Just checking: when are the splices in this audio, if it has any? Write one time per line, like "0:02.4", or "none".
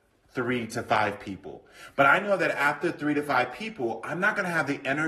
none